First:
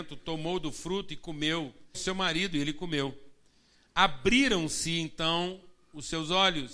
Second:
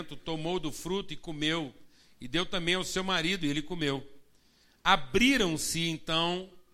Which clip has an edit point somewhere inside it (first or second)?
first